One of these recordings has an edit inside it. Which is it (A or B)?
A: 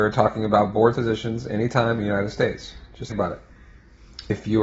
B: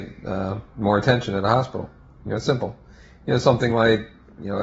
A